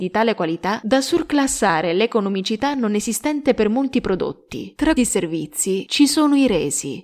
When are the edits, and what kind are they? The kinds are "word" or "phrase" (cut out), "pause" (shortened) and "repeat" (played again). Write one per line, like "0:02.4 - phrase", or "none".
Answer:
0:05.0 - word